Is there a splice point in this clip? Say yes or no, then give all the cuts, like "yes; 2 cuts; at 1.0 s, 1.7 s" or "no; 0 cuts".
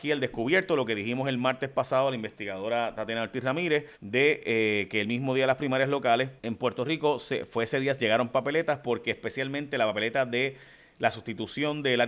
yes; 2 cuts; at 3.9 s, 6.4 s